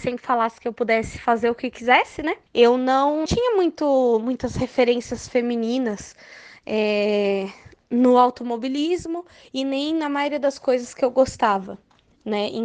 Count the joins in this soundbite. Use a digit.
2